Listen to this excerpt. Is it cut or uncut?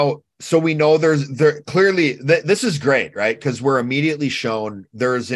uncut